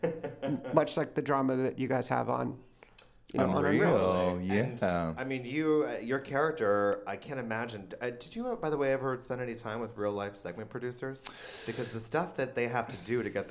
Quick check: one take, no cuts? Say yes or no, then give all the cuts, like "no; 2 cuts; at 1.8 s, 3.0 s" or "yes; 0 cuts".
yes; 0 cuts